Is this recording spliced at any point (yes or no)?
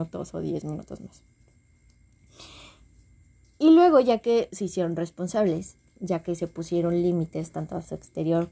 no